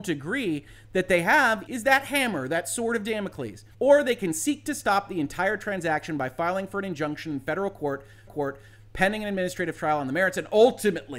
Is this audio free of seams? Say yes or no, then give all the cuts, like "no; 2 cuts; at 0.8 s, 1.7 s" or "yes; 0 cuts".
no; 3 cuts; at 1.7 s, 3.7 s, 8.3 s